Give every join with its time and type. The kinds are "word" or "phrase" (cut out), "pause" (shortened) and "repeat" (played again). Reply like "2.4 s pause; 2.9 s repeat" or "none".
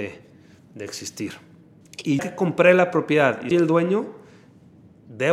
2.2 s word; 3.5 s word